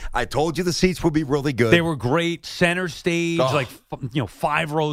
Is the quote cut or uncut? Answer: uncut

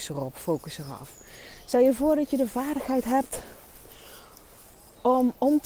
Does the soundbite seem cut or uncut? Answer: uncut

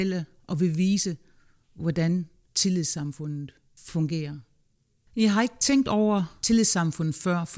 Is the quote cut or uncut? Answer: uncut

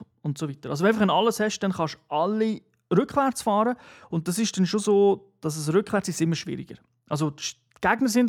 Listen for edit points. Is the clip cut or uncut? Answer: uncut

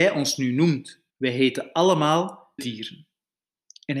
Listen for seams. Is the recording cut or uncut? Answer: cut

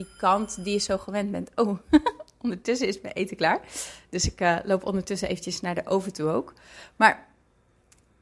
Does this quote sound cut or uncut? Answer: uncut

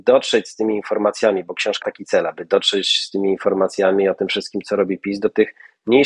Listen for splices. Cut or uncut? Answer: cut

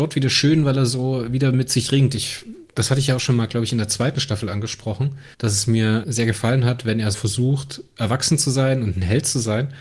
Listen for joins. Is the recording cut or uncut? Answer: cut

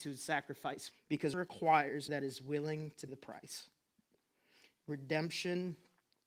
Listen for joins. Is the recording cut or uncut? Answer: cut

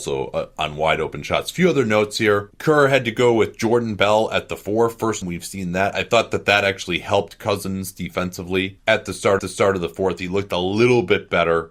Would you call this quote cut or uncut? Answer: cut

